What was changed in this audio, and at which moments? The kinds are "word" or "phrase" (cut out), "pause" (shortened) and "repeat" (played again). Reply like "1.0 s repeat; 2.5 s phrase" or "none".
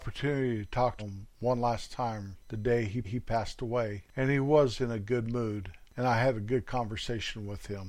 1.0 s word; 3.0 s repeat; 4.1 s pause